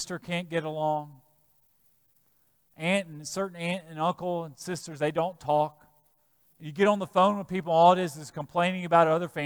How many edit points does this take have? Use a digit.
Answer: 0